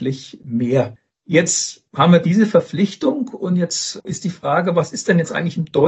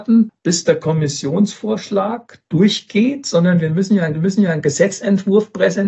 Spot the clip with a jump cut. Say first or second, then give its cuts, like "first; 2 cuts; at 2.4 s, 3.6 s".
second; 1 cut; at 4.1 s